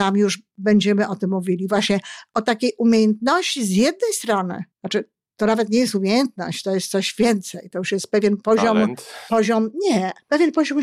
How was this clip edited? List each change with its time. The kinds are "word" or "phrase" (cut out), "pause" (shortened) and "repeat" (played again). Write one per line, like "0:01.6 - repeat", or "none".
0:04.7 - pause